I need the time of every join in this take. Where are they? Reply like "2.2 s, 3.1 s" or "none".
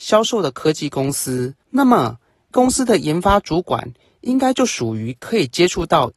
1.6 s, 2.5 s